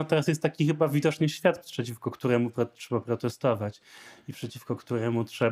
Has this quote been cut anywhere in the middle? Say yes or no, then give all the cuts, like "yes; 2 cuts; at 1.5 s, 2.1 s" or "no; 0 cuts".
no; 0 cuts